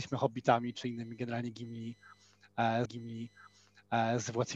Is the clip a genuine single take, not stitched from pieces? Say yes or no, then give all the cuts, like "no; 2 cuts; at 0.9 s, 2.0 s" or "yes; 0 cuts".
no; 1 cut; at 2.9 s